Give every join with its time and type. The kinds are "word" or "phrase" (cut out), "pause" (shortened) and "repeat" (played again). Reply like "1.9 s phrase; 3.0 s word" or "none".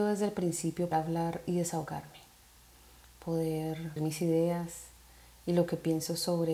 0.9 s word; 4.0 s word